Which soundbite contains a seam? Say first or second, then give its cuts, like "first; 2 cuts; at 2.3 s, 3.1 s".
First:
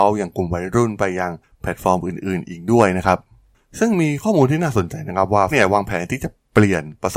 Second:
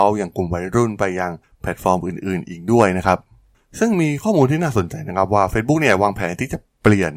first; 1 cut; at 5.5 s